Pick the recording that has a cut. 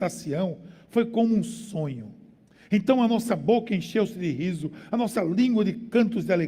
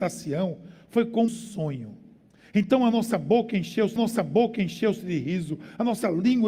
second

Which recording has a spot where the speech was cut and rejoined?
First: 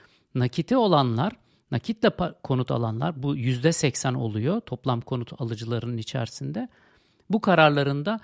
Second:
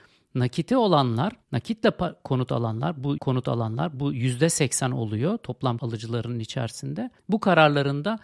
second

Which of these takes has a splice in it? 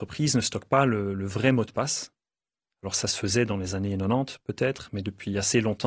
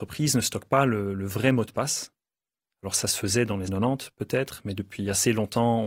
second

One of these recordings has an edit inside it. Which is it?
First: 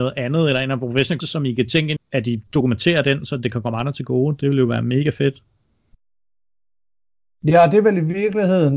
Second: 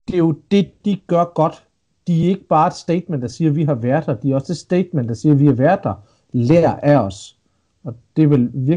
first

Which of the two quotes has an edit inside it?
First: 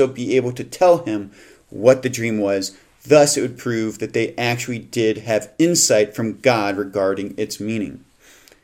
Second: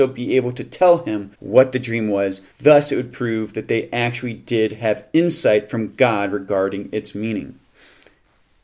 second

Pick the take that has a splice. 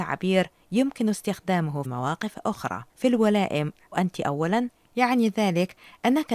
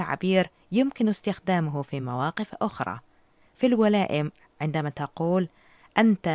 first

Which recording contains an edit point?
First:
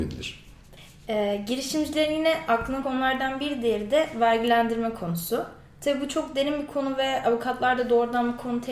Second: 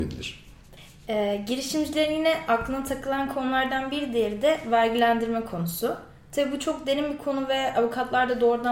first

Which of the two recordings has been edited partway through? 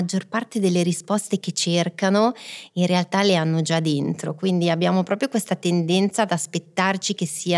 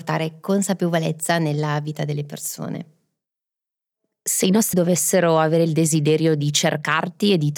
second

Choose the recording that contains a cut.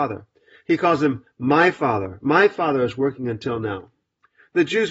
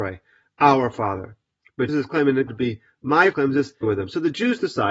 second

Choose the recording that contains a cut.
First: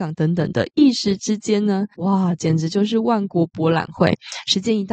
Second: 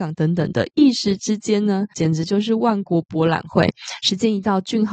second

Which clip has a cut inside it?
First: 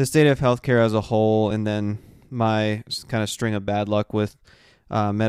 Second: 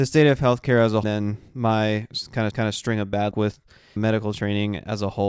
second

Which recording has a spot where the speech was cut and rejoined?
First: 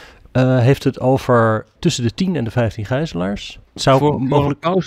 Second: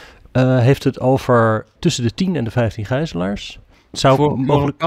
first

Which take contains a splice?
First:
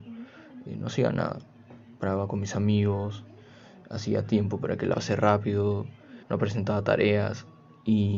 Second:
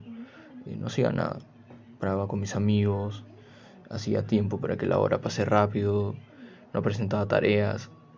first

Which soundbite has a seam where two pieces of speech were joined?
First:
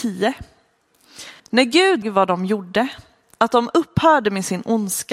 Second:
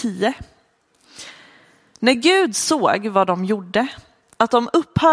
first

